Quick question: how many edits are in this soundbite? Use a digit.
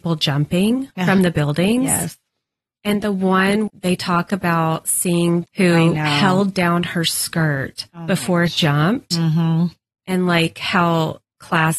3